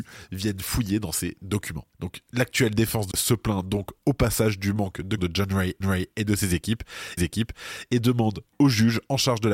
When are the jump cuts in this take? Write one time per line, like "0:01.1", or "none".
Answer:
0:01.9
0:03.1
0:05.2
0:05.8
0:07.2